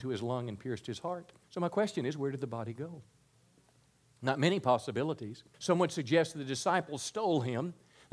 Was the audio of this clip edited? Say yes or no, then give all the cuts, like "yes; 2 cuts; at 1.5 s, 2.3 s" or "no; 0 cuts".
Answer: yes; 2 cuts; at 1.4 s, 5.5 s